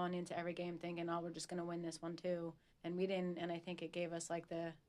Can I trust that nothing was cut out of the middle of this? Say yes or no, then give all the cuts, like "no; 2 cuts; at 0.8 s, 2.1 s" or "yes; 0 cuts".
no; 1 cut; at 2.7 s